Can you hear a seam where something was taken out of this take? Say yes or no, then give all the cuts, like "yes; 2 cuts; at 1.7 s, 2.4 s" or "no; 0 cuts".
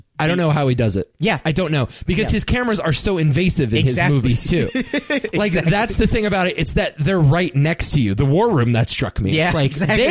no; 0 cuts